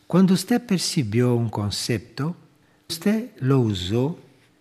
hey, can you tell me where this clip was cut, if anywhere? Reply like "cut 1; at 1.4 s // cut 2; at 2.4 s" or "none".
cut 1; at 2.9 s